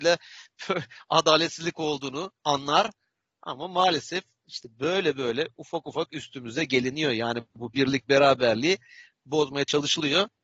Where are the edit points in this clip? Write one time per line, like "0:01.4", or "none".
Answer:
0:02.4